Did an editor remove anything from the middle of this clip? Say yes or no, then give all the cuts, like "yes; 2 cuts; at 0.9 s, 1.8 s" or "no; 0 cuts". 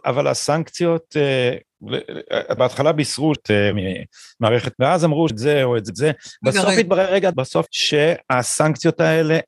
yes; 8 cuts; at 2.6 s, 3.4 s, 3.7 s, 4.7 s, 5.3 s, 5.9 s, 7.3 s, 7.7 s